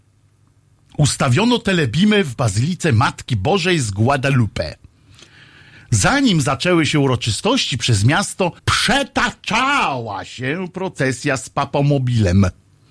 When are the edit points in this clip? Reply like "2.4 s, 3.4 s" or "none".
8.6 s